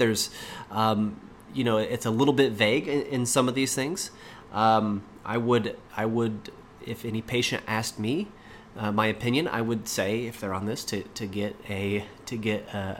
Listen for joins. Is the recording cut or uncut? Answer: cut